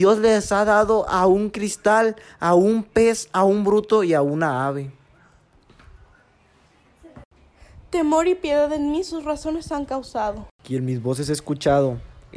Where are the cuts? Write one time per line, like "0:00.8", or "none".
none